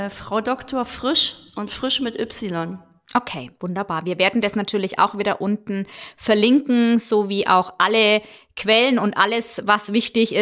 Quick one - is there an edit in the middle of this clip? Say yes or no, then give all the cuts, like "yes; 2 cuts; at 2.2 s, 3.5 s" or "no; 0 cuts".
no; 0 cuts